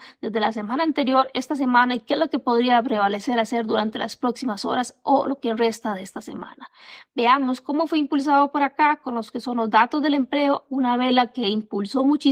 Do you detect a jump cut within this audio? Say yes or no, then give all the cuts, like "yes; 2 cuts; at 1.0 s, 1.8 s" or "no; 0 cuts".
no; 0 cuts